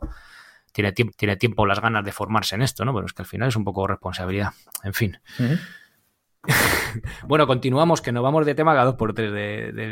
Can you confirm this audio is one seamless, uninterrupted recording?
no; 1 cut; at 1.1 s

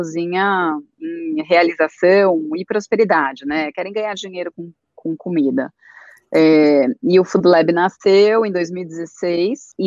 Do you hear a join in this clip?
no; 0 cuts

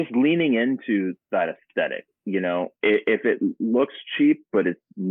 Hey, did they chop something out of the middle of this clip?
no; 0 cuts

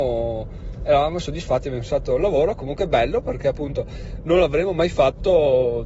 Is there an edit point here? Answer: no; 0 cuts

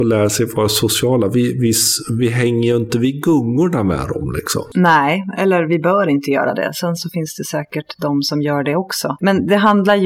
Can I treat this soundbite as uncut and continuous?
yes; 0 cuts

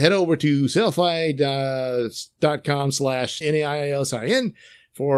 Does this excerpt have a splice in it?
yes; 1 cut; at 3.4 s

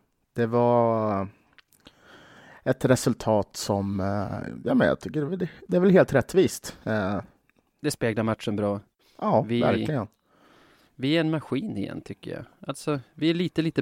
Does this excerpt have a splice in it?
no; 0 cuts

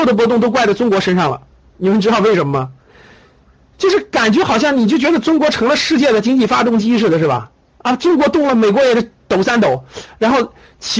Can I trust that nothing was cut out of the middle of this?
no; 2 cuts; at 1.5 s, 7.6 s

